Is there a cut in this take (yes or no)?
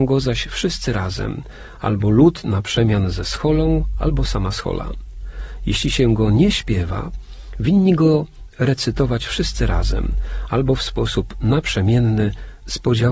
no